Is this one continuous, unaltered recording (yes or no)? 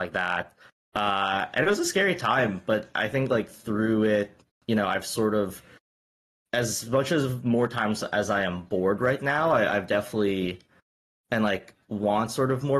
yes